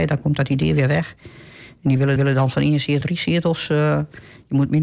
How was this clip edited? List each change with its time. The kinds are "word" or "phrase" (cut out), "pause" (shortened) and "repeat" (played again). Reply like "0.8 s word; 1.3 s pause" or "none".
2.2 s repeat; 3.0 s word

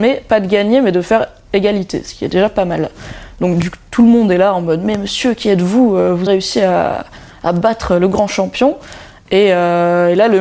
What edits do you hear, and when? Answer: 6.3 s word

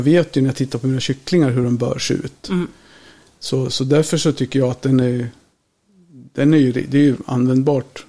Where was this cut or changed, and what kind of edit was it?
none

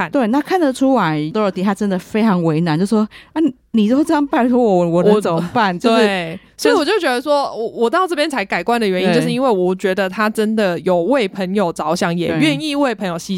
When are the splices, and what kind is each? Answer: none

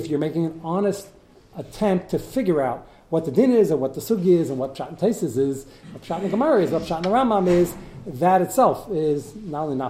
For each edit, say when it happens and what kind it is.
none

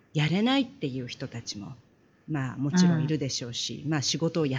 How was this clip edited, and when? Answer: none

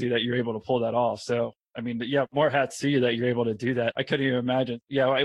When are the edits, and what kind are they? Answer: none

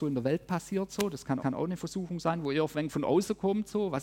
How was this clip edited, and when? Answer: 1.4 s repeat

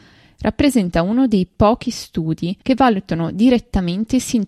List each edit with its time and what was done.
2.6 s pause

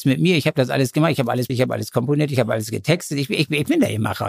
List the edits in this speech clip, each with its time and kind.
1.5 s word

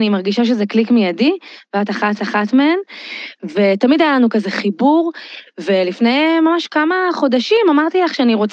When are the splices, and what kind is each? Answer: 2.2 s repeat

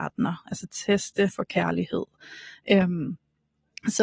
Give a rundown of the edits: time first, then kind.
1.3 s word

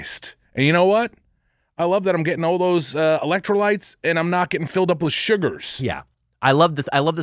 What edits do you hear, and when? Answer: none

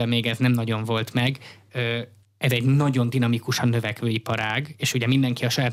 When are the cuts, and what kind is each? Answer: 2.2 s pause

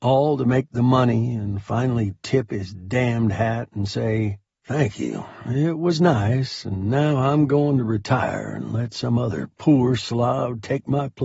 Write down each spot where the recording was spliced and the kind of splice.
none

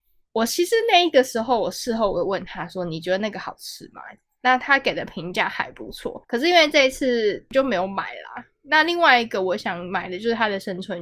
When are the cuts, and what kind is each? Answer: 6.2 s pause

